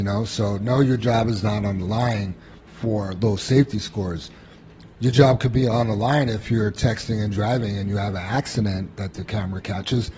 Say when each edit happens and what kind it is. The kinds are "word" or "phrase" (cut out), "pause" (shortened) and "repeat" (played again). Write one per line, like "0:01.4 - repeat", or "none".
0:02.6 - pause